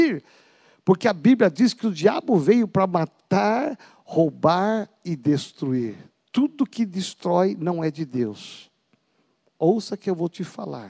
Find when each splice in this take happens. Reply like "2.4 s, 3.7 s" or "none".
none